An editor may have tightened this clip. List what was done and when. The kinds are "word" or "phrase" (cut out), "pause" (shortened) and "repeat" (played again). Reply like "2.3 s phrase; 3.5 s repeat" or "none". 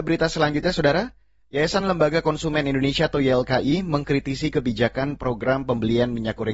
none

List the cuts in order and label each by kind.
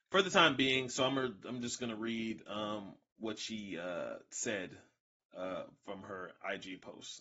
none

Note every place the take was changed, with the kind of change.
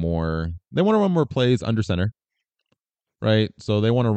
none

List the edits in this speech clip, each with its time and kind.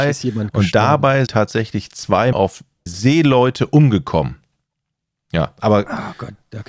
1.3 s word; 2.3 s word; 2.9 s word

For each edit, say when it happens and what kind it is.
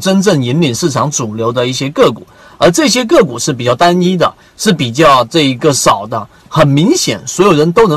none

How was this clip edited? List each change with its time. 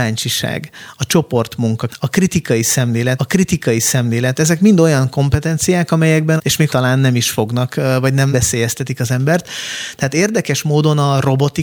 1.9 s word; 3.2 s repeat; 6.4 s phrase; 6.7 s phrase; 8.3 s word

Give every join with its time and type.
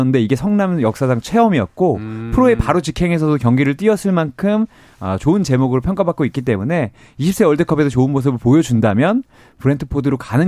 none

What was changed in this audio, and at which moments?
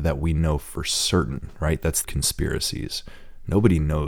2.0 s phrase

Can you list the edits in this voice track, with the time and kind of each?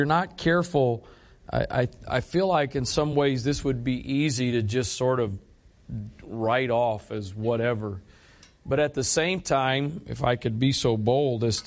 none

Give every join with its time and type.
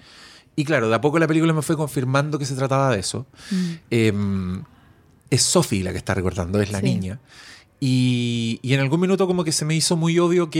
5.3 s word

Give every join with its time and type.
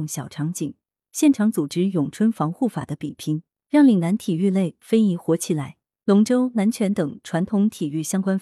none

